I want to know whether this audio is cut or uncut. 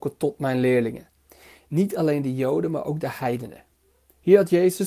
uncut